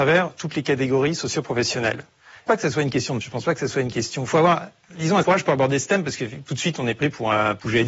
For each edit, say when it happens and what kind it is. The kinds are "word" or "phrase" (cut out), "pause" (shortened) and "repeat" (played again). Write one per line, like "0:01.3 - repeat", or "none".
0:02.5 - phrase
0:03.2 - word
0:05.2 - word